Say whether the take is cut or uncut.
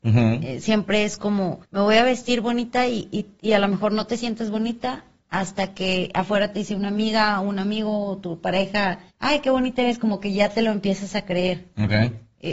cut